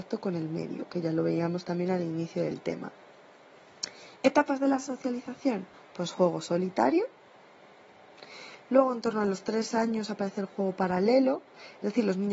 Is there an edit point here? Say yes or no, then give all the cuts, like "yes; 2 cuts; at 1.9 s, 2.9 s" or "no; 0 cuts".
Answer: yes; 1 cut; at 5.7 s